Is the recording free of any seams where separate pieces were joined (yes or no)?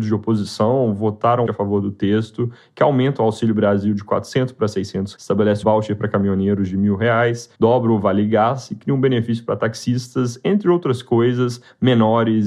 no